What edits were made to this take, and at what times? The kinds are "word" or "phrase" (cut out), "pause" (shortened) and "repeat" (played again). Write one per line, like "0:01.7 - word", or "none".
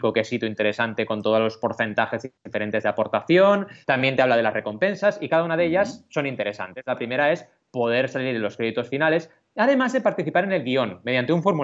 0:03.8 - pause